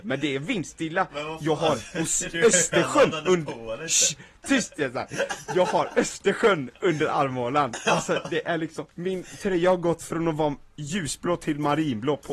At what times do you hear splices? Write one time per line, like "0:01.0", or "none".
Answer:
0:02.3
0:08.9

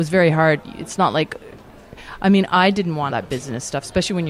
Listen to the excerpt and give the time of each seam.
0:03.1

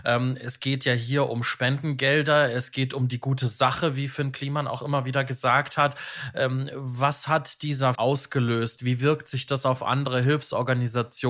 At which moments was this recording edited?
0:08.0

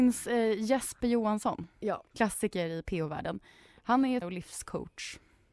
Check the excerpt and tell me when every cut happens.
0:01.0
0:04.2

